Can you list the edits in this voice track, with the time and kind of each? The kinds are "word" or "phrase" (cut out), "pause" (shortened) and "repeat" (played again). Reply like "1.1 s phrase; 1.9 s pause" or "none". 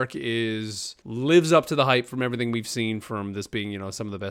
1.0 s pause